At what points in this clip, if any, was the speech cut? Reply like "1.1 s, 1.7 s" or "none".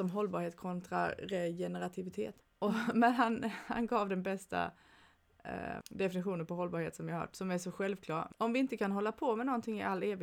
2.4 s, 5.8 s, 8.3 s